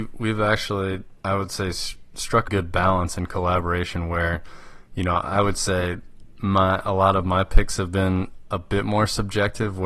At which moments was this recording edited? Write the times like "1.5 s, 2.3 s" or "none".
1.2 s, 2.5 s